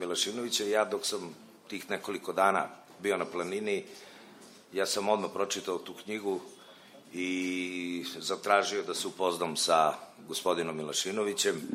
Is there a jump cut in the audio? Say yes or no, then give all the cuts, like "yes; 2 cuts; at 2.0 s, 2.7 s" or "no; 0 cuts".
no; 0 cuts